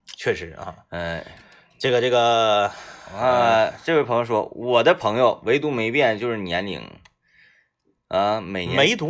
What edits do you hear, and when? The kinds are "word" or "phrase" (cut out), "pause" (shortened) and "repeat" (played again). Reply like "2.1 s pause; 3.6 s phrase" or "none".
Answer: none